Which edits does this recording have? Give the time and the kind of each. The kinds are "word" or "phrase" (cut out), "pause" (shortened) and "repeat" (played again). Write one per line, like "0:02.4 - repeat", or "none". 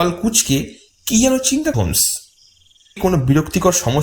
0:01.7 - word
0:03.0 - word